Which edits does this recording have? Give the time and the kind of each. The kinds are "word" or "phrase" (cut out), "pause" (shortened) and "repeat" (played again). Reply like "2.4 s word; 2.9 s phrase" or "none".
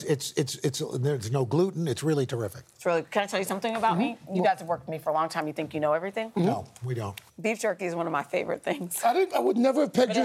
7.3 s pause